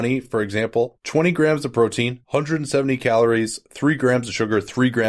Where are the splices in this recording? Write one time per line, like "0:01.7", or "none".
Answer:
none